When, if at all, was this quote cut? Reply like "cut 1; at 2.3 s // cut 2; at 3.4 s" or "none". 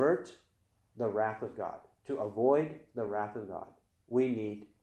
none